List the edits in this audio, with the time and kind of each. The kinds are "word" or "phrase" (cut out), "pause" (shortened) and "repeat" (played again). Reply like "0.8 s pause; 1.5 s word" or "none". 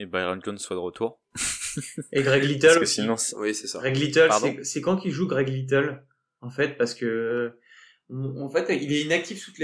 none